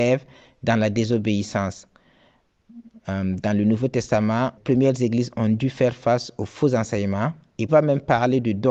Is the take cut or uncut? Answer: cut